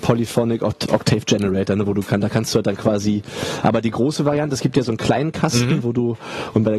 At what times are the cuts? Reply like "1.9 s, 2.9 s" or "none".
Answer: none